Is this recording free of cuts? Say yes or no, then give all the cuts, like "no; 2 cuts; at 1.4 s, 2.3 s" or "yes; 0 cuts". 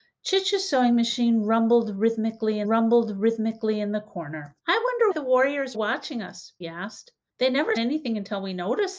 no; 7 cuts; at 2.6 s, 4.6 s, 5.1 s, 5.7 s, 6.6 s, 7.3 s, 7.8 s